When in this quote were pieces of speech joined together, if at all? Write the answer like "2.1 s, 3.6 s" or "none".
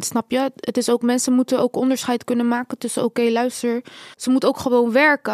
4.1 s